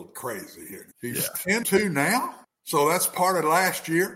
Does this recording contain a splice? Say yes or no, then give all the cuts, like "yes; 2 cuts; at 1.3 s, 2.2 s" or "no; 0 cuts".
yes; 3 cuts; at 0.9 s, 1.6 s, 2.4 s